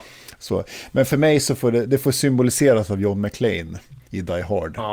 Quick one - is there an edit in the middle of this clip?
no; 0 cuts

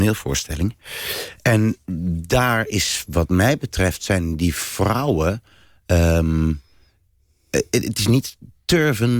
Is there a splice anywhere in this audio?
no; 0 cuts

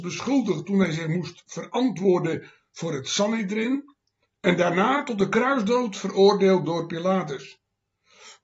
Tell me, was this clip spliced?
no; 0 cuts

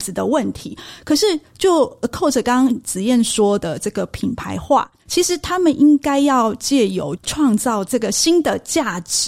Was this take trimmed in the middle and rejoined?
yes; 1 cut; at 5.0 s

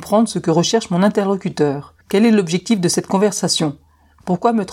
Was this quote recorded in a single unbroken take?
no; 1 cut; at 2.0 s

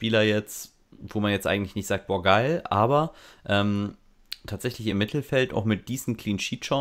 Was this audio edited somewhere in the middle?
no; 0 cuts

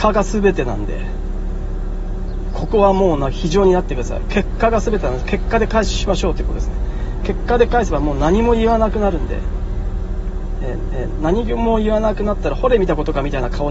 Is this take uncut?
no; 1 cut; at 10.9 s

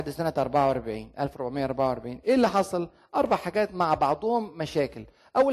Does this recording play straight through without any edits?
yes; 0 cuts

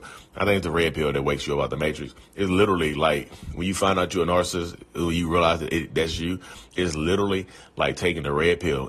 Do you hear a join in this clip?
no; 0 cuts

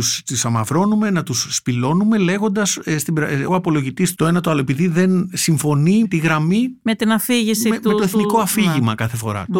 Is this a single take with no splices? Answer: no; 3 cuts; at 3.5 s, 4.1 s, 6.0 s

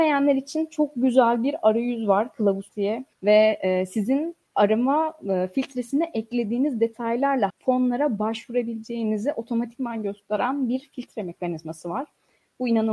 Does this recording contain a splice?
yes; 3 cuts; at 2.7 s, 3.1 s, 7.5 s

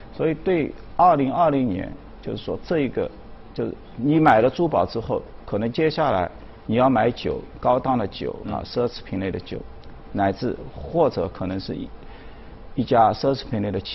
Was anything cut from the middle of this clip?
yes; 1 cut; at 8.4 s

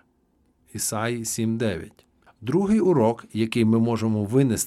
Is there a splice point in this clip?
no; 0 cuts

